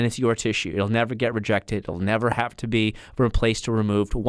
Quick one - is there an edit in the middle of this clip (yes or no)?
no